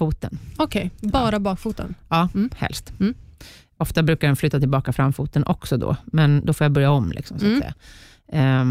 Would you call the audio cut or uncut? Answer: uncut